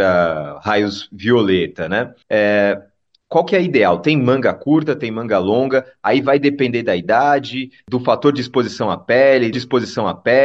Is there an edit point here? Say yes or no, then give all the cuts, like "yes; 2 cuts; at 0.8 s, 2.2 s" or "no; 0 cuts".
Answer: yes; 2 cuts; at 2.2 s, 9.5 s